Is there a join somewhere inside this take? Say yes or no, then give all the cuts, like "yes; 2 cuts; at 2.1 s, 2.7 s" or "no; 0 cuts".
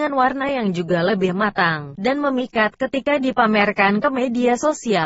no; 0 cuts